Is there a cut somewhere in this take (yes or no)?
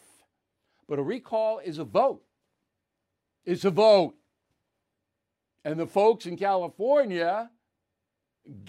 no